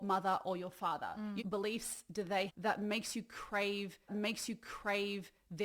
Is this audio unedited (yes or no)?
no